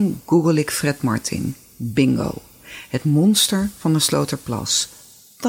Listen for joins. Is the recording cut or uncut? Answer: uncut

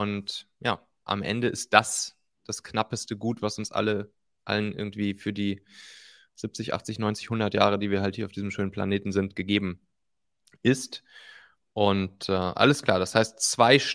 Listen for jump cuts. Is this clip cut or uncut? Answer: uncut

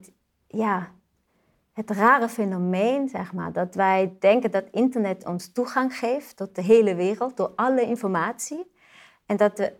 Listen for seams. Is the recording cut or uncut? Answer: uncut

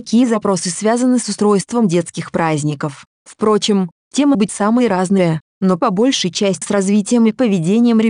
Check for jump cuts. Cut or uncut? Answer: cut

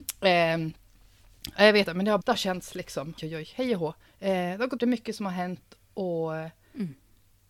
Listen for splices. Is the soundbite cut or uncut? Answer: cut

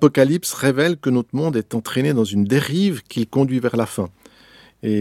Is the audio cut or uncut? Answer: uncut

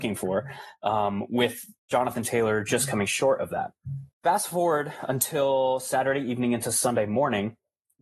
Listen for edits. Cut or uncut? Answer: cut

